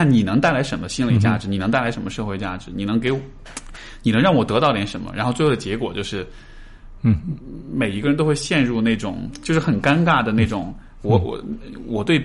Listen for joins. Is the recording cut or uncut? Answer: uncut